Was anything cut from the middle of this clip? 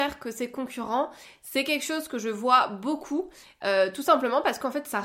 no; 0 cuts

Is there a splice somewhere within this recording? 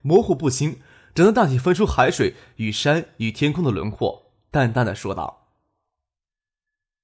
no; 0 cuts

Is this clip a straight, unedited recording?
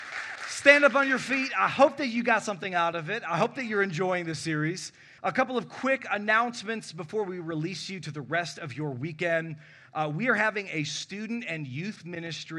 no; 1 cut; at 5.2 s

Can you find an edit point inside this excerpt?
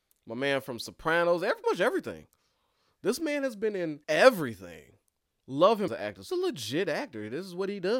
yes; 4 cuts; at 1.6 s, 4.0 s, 5.9 s, 6.3 s

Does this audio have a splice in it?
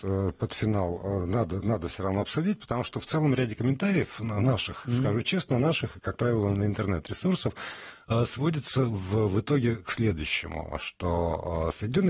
no; 0 cuts

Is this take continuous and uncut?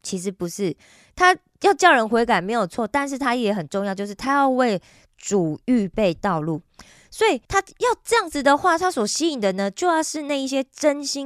no; 1 cut; at 7.4 s

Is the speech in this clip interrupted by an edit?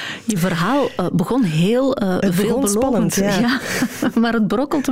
no; 0 cuts

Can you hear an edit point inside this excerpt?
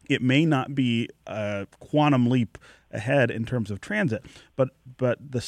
no; 0 cuts

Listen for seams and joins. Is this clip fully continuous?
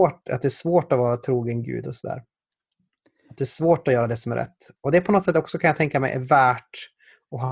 yes; 0 cuts

